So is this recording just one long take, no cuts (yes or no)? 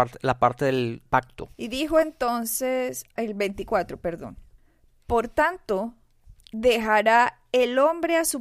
no